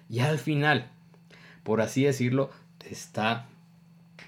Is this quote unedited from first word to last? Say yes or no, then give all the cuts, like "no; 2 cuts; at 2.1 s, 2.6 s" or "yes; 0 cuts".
no; 1 cut; at 2.8 s